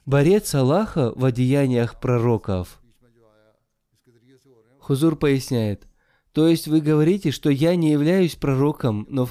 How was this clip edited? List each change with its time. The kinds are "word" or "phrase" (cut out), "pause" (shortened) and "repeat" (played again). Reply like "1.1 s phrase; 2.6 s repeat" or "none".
none